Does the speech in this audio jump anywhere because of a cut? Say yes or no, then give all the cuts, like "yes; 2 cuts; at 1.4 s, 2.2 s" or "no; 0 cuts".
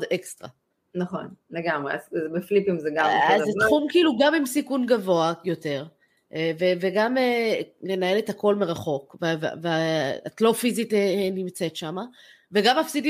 no; 0 cuts